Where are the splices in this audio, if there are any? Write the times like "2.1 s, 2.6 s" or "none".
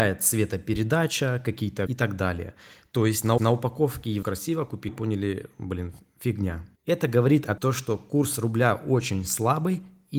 1.9 s, 3.4 s, 4.2 s, 4.9 s, 6.8 s, 7.6 s

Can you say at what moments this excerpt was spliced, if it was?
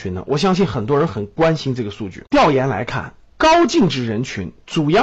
2.3 s

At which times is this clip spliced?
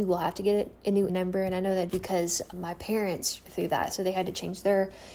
1.1 s, 1.9 s, 2.5 s, 3.5 s

